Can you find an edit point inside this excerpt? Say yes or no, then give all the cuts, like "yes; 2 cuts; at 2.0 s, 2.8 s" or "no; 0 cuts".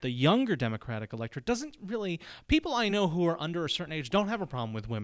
no; 0 cuts